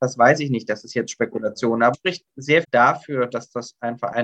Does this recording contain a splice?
yes; 2 cuts; at 1.9 s, 2.6 s

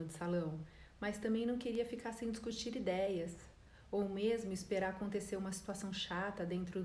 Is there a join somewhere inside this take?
no; 0 cuts

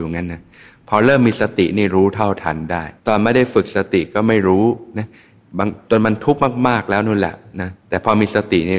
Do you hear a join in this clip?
yes; 2 cuts; at 3.0 s, 7.8 s

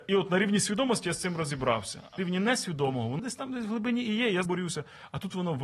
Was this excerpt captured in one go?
no; 3 cuts; at 2.2 s, 3.2 s, 4.5 s

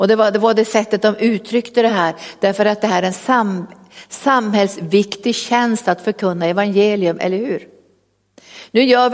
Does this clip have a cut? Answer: no; 0 cuts

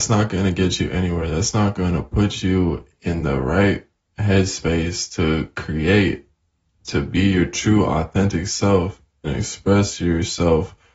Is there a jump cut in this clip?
no; 0 cuts

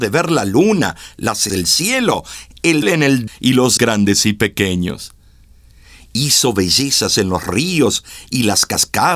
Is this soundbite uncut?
no; 4 cuts; at 1.5 s, 2.8 s, 3.3 s, 3.8 s

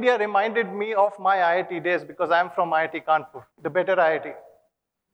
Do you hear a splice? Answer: yes; 1 cut; at 3.5 s

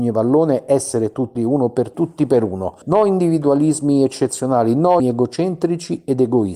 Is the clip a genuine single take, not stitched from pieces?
no; 4 cuts; at 1.4 s, 1.9 s, 2.8 s, 5.0 s

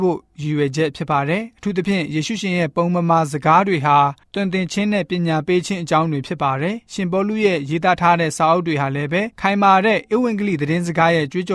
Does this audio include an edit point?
yes; 1 cut; at 9.3 s

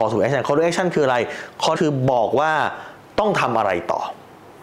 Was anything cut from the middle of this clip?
yes; 1 cut; at 1.7 s

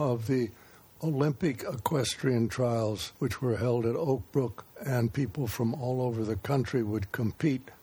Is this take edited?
yes; 2 cuts; at 3.2 s, 4.7 s

